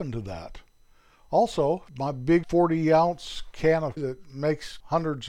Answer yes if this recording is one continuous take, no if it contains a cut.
no